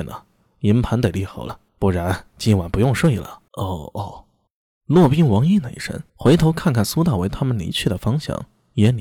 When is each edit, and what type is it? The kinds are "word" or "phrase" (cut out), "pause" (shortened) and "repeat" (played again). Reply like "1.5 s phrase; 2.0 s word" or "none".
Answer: 1.7 s pause; 3.5 s pause; 4.5 s pause; 6.1 s pause